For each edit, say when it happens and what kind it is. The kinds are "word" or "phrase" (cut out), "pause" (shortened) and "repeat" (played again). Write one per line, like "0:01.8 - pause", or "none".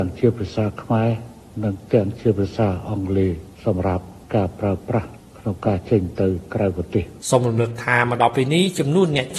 0:03.5 - pause
0:04.2 - pause
0:07.2 - pause

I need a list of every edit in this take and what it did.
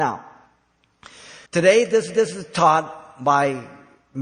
0:01.5 - pause
0:02.1 - repeat

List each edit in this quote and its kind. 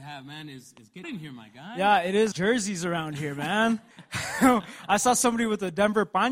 0:01.0 - word
0:02.3 - phrase
0:03.9 - pause

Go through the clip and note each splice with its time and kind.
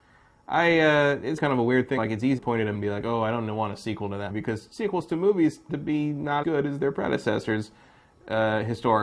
0:01.4 - word
0:02.0 - word
0:02.4 - word
0:02.7 - word
0:04.3 - word
0:05.7 - word
0:06.4 - word

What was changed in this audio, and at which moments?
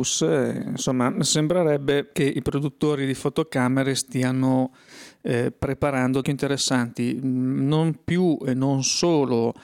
0:06.2 - phrase

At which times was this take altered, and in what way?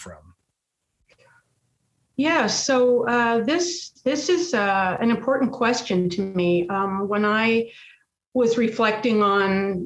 none

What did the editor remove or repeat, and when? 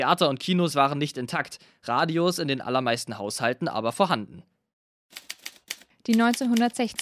none

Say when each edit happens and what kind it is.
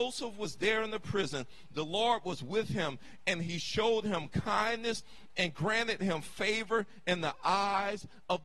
none

